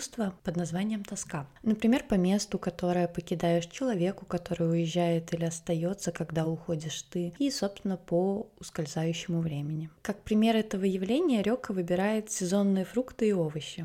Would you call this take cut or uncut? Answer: uncut